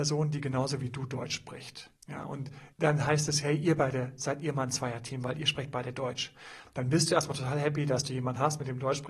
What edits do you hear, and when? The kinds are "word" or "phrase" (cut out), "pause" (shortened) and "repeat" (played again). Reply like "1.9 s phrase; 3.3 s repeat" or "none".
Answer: 2.0 s pause; 2.7 s pause